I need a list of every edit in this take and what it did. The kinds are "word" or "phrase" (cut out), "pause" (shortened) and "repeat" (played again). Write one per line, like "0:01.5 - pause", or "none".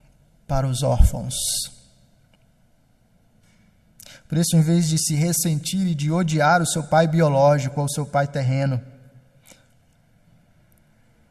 none